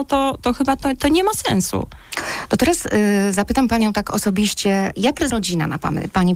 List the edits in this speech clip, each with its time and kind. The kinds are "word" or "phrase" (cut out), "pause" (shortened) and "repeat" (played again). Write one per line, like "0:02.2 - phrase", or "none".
0:01.0 - word
0:05.3 - word